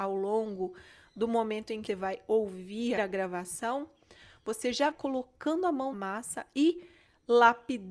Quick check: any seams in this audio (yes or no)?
yes